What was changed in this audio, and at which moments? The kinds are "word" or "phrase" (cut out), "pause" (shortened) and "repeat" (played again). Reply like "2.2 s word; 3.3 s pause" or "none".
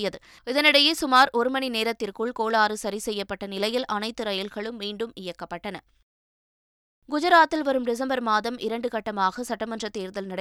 none